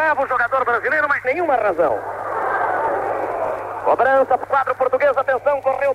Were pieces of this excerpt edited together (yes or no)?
yes